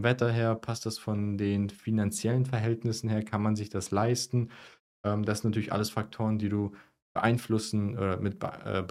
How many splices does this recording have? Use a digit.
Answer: 0